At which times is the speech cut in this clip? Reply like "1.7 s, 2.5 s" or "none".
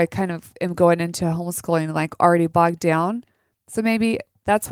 none